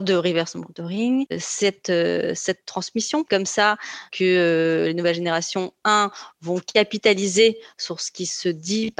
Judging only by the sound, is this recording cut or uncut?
cut